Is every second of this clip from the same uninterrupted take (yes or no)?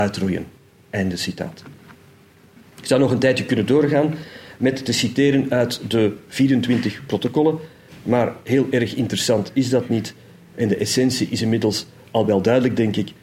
yes